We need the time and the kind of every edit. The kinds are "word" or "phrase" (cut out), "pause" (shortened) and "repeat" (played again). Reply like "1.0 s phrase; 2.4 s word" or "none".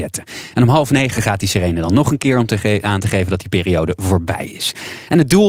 none